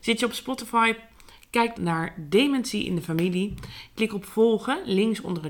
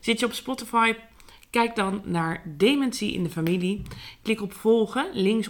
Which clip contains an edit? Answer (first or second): first